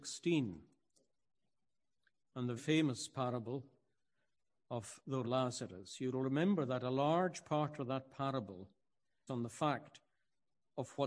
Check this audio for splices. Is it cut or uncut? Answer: cut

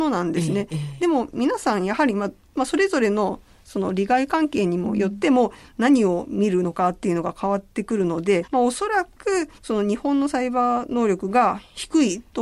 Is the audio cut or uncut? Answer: cut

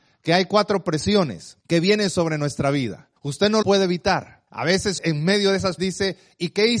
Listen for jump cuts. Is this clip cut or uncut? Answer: cut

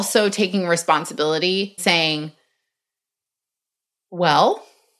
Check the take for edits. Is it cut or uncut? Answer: cut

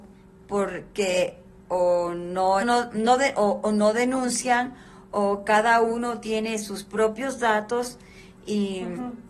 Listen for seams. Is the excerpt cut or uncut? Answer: cut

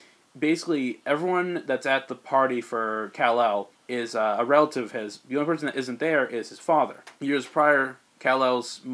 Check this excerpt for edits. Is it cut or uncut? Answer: cut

